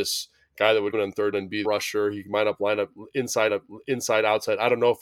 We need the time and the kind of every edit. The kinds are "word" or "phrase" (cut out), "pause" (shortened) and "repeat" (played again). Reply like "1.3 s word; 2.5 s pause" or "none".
0.9 s word; 1.3 s word; 1.6 s phrase; 3.5 s repeat